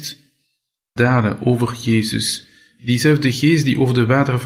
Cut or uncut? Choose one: cut